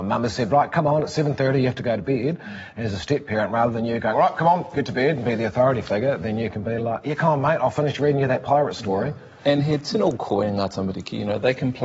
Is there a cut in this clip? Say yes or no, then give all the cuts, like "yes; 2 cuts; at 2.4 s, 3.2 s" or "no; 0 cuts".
no; 0 cuts